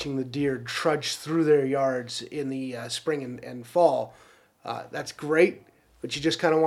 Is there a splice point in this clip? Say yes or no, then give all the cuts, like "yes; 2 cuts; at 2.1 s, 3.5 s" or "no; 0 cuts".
no; 0 cuts